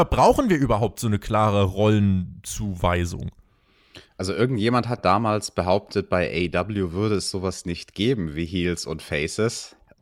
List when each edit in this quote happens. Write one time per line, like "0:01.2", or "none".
0:05.0